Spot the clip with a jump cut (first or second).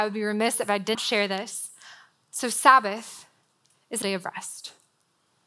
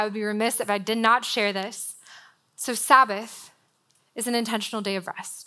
first